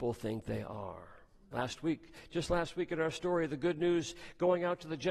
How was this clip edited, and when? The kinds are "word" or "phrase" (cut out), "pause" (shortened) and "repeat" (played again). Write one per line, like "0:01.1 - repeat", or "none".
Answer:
none